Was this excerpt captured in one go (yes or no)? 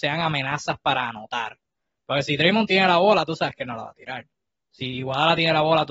yes